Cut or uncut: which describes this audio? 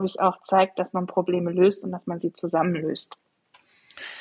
uncut